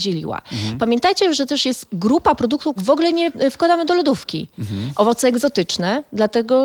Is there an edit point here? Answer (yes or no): yes